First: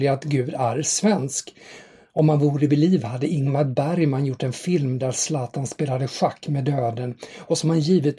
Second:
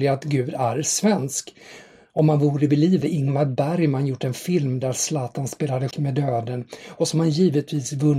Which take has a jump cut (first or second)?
second